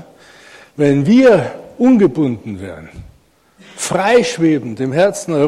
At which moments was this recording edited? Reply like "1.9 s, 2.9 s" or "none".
none